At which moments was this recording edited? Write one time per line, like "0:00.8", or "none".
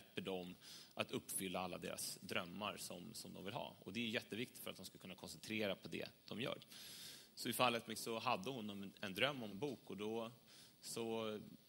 0:08.0
0:09.5